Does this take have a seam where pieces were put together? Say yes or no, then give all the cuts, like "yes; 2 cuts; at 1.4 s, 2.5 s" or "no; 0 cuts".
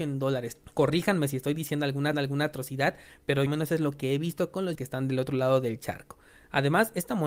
yes; 3 cuts; at 2.1 s, 3.5 s, 4.7 s